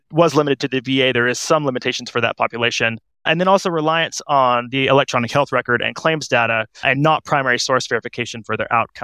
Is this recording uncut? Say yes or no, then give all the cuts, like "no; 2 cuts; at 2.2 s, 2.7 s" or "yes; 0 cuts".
yes; 0 cuts